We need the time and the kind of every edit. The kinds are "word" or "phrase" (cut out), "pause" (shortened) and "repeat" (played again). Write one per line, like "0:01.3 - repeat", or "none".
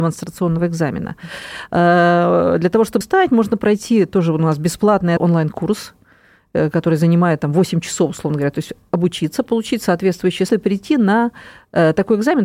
0:03.0 - word
0:05.2 - word
0:10.5 - word